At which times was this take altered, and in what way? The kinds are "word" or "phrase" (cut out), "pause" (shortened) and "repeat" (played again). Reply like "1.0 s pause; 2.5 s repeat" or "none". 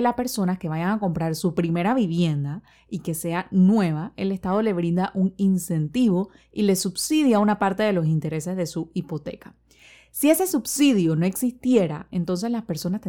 none